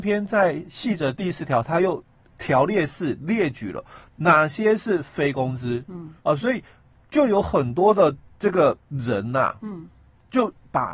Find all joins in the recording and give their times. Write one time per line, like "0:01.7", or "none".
0:02.3
0:06.2
0:08.8